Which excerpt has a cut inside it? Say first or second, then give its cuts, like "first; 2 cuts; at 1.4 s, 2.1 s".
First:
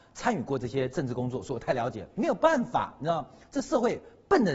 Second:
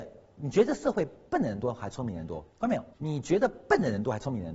second; 2 cuts; at 2.5 s, 2.9 s